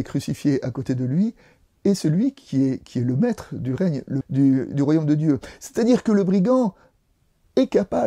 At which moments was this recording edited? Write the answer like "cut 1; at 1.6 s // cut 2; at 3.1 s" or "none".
cut 1; at 4.2 s